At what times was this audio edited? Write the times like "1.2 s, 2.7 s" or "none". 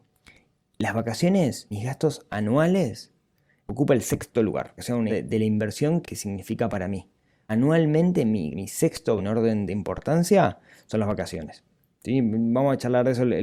1.7 s, 3.6 s, 4.8 s, 5.1 s, 6.0 s, 7.5 s, 8.5 s, 9.2 s, 9.7 s